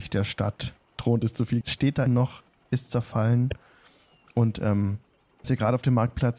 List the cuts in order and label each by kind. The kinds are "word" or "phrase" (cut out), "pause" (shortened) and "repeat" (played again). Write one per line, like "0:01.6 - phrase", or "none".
0:01.6 - word
0:02.1 - word
0:05.4 - word